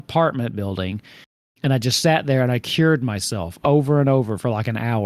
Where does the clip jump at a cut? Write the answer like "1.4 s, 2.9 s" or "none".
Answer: none